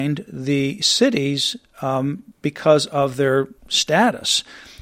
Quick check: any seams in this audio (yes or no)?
yes